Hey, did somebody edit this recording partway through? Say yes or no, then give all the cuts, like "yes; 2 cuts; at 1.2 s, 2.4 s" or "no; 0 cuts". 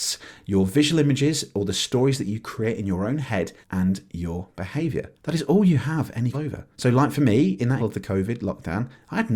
yes; 5 cuts; at 3.6 s, 5.2 s, 6.3 s, 6.7 s, 7.8 s